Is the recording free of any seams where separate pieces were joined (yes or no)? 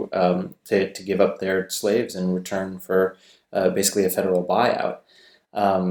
yes